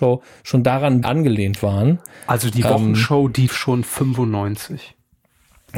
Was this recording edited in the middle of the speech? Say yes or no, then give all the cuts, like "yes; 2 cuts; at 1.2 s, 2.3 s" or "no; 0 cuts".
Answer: yes; 2 cuts; at 1.0 s, 3.5 s